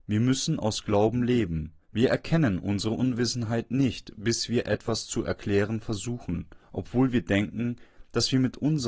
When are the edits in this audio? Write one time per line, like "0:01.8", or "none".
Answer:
0:01.8
0:06.6